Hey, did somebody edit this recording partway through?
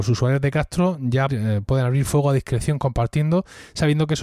yes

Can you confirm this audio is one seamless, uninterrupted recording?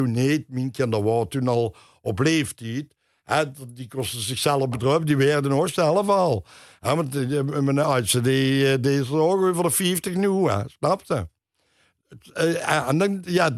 yes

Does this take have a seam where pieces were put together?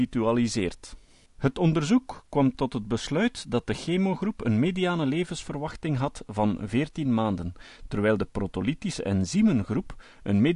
yes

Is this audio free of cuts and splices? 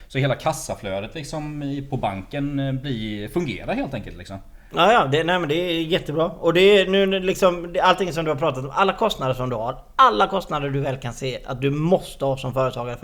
yes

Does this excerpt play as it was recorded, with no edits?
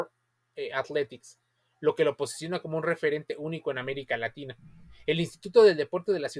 yes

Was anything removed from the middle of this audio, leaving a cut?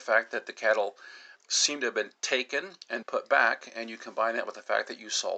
yes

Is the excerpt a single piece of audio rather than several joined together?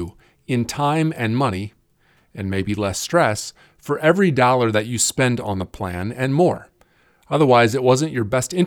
yes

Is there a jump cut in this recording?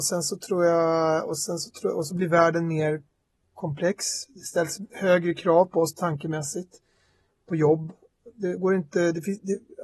no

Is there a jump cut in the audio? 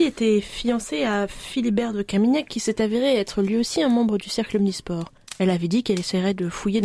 no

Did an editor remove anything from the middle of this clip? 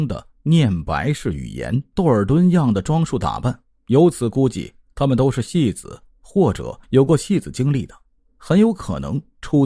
yes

